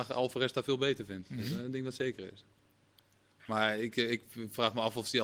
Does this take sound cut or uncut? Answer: uncut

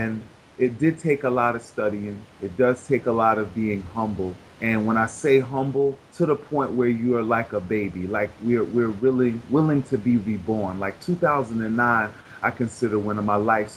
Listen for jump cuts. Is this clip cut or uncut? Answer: cut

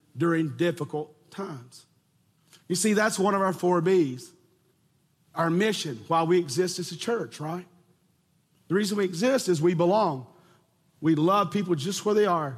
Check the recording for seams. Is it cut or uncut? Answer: uncut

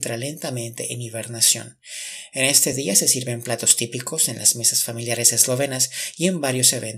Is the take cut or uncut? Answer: uncut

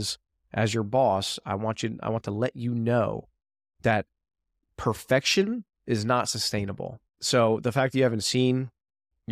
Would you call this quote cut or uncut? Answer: cut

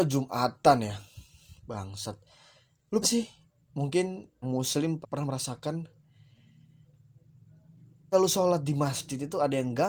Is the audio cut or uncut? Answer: cut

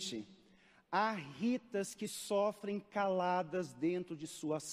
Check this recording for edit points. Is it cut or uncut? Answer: uncut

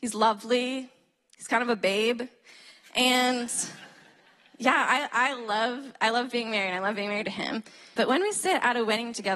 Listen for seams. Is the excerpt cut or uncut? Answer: cut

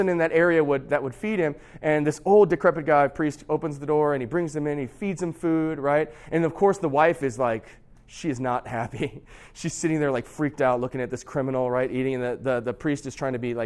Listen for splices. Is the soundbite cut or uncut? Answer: uncut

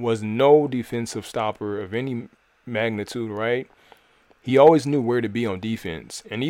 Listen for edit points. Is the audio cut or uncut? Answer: uncut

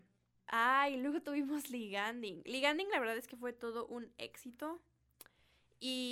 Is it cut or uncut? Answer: uncut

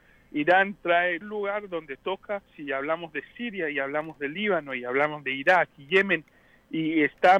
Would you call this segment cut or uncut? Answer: cut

